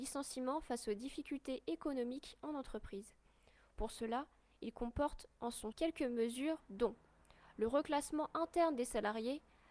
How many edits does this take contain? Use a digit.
1